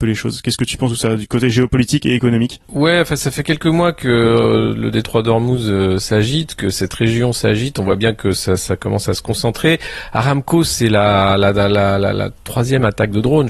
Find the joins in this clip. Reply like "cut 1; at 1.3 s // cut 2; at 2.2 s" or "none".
cut 1; at 2.6 s